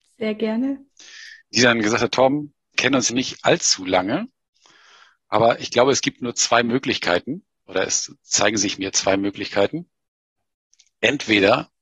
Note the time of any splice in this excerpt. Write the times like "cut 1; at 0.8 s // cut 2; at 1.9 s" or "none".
cut 1; at 1.4 s // cut 2; at 2.7 s // cut 3; at 3.1 s

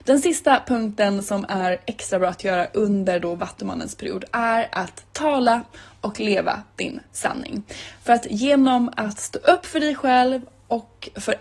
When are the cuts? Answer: none

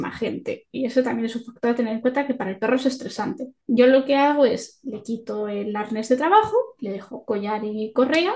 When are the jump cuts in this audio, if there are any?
cut 1; at 3.6 s

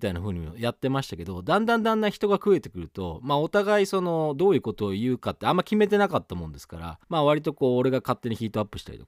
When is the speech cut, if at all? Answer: cut 1; at 7.0 s

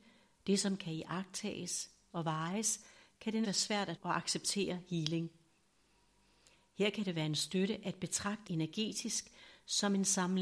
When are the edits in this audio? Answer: cut 1; at 2.1 s // cut 2; at 3.4 s // cut 3; at 4.0 s // cut 4; at 8.5 s

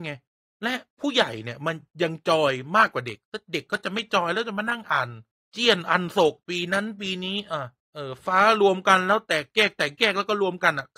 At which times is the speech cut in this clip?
cut 1; at 5.4 s // cut 2; at 7.8 s

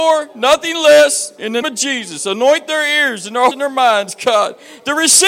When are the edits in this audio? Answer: cut 1; at 1.6 s // cut 2; at 3.5 s

